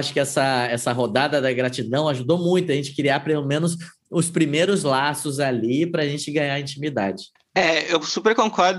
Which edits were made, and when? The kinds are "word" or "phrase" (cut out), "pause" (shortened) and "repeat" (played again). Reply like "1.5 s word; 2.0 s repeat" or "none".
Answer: 7.4 s pause